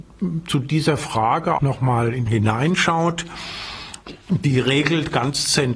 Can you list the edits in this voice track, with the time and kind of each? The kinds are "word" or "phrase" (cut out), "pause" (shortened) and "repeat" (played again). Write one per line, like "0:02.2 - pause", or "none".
0:01.6 - word
0:02.3 - phrase